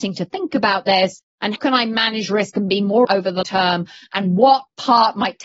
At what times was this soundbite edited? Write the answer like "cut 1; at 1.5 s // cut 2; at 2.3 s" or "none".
cut 1; at 1.6 s // cut 2; at 3.0 s // cut 3; at 3.4 s